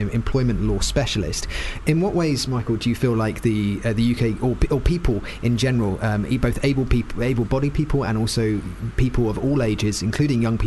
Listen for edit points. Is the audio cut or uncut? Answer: uncut